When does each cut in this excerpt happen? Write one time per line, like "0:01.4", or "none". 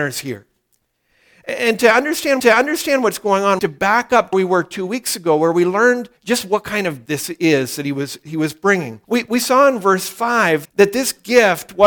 0:02.4
0:03.6
0:04.3
0:06.2
0:07.1
0:09.0
0:10.6